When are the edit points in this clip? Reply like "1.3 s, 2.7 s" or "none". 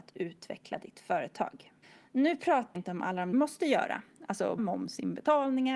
1.8 s, 2.7 s, 3.3 s, 4.6 s